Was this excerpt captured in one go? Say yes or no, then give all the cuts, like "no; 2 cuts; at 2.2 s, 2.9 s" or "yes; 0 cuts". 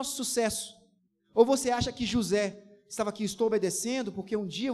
no; 1 cut; at 1.1 s